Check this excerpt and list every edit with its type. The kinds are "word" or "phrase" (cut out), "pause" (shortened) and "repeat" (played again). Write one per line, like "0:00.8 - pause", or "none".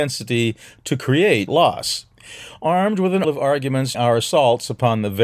0:01.5 - word
0:03.2 - word
0:03.9 - word